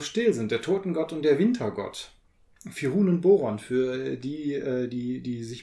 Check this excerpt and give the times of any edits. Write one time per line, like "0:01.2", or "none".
none